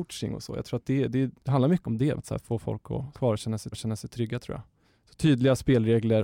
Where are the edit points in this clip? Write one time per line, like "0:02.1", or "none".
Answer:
0:01.4
0:01.8
0:02.2
0:03.1
0:03.7
0:04.8